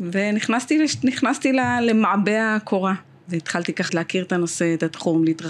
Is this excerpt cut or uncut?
cut